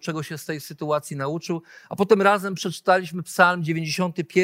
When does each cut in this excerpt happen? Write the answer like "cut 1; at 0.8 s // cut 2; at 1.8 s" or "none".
none